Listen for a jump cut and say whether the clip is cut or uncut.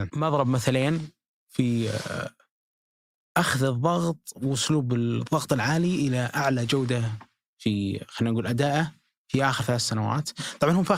uncut